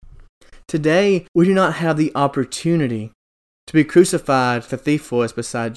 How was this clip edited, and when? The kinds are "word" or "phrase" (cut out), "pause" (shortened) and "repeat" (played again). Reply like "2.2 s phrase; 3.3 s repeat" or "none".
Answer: 1.3 s pause; 4.7 s word